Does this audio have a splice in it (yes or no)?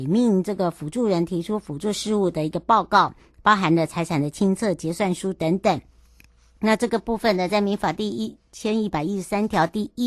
no